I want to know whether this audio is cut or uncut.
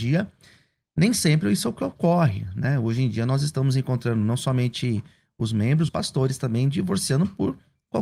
cut